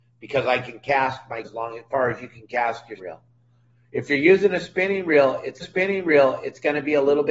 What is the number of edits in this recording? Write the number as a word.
three